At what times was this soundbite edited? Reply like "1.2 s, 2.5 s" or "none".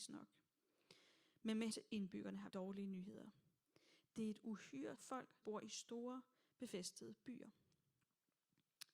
1.7 s, 2.5 s, 4.9 s, 5.4 s